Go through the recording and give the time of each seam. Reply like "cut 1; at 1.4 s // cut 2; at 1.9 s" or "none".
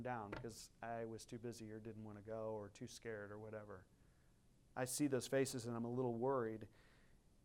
none